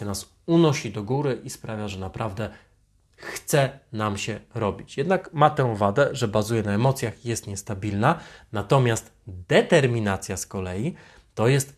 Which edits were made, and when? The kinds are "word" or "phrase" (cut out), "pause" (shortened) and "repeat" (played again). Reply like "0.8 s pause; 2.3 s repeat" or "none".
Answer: none